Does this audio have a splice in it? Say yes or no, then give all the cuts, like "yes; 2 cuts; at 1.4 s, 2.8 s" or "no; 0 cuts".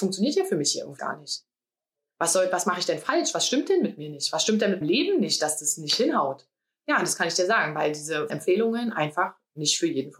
yes; 3 cuts; at 1.0 s, 4.8 s, 8.3 s